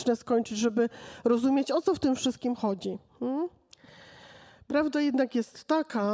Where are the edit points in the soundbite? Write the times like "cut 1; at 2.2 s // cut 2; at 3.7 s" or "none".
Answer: cut 1; at 3.1 s